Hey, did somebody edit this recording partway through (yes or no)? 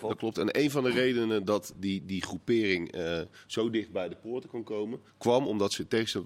yes